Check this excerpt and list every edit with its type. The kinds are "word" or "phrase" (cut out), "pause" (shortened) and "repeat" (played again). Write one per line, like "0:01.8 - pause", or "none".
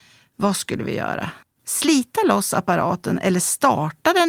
0:01.4 - pause